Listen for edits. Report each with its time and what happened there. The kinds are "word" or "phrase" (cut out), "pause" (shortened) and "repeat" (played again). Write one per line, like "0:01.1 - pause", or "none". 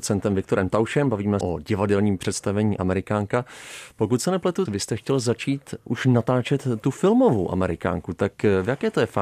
0:01.4 - phrase
0:04.7 - phrase